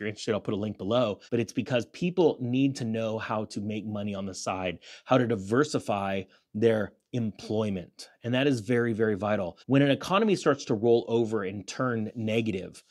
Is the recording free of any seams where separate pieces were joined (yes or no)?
no